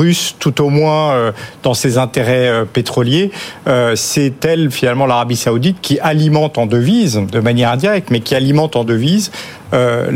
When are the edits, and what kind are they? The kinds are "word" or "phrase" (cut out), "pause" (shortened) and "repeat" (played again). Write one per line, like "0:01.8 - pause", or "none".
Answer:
none